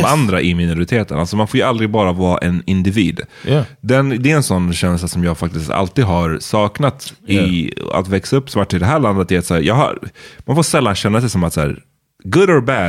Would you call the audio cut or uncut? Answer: uncut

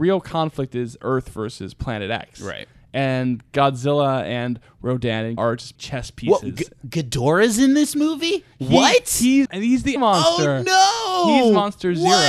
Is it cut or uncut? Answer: cut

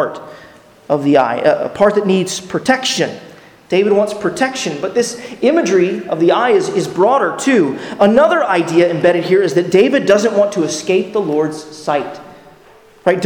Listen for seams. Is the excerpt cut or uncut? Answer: uncut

